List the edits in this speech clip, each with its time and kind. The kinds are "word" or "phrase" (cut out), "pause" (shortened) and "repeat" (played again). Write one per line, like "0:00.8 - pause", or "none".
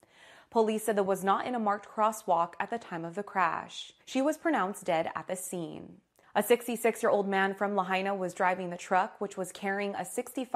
0:01.1 - word
0:04.0 - pause
0:06.2 - pause

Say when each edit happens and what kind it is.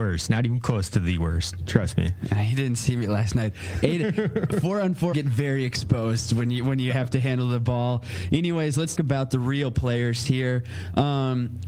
0:05.1 - word
0:06.9 - word
0:08.9 - word

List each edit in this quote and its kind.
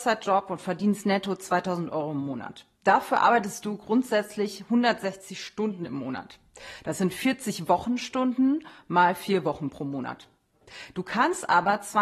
0:02.7 - pause

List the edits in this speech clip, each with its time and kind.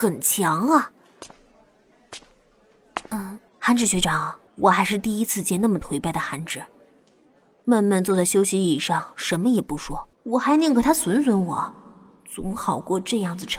0:03.5 - pause
0:04.5 - pause
0:10.1 - pause

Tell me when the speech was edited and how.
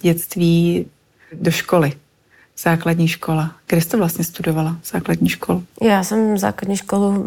0:05.7 - pause

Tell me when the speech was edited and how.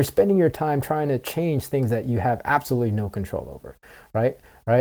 none

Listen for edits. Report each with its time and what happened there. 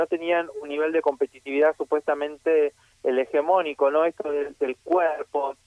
none

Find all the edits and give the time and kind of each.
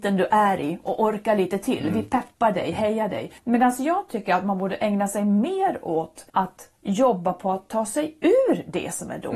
0:03.4 - pause
0:06.3 - pause

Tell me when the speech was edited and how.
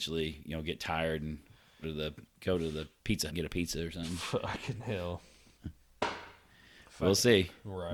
0:01.8 - word
0:03.3 - word

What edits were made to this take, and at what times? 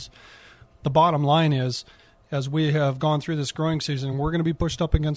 none

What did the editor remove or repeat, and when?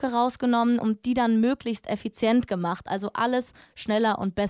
none

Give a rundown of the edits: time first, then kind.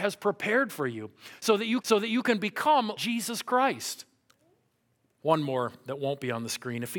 0:01.8 - repeat
0:03.0 - word
0:04.3 - pause

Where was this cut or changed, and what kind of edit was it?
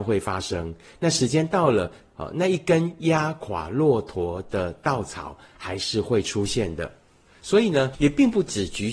none

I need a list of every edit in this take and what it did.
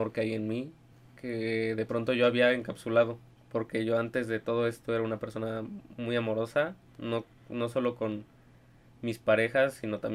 0:00.9 - pause
0:03.4 - pause

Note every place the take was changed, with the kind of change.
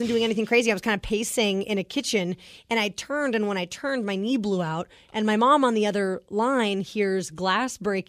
none

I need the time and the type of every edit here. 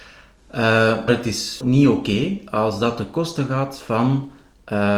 0:01.1 - word
0:01.6 - word

